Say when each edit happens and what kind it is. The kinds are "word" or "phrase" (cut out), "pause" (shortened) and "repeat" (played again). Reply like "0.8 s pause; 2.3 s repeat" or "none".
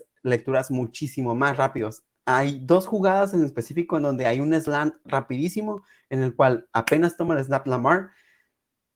none